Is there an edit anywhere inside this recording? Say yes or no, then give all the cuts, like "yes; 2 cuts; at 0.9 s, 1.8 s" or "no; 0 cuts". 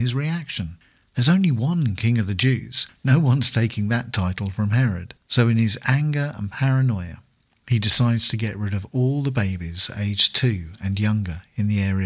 yes; 1 cut; at 5.2 s